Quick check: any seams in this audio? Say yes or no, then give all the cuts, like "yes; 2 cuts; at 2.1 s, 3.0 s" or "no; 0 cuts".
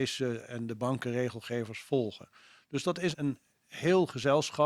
yes; 1 cut; at 3.1 s